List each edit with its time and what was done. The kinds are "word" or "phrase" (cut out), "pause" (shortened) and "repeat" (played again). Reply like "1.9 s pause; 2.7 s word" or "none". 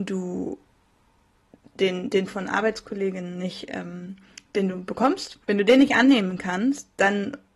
1.8 s word; 2.3 s phrase; 5.4 s pause